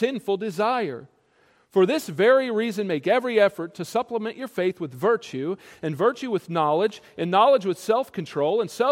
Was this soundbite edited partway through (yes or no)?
no